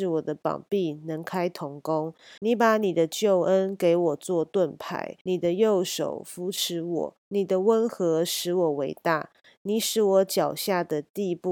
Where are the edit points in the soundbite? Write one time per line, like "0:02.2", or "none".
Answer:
0:02.4
0:05.2
0:07.2